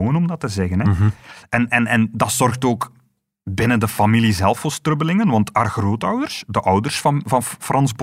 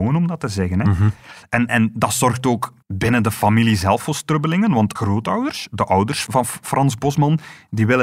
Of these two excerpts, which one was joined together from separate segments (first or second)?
second